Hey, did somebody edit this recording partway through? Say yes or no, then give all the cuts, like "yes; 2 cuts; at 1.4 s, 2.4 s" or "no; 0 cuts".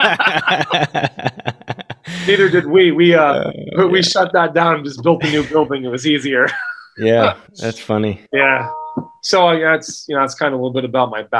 yes; 2 cuts; at 7.5 s, 8.3 s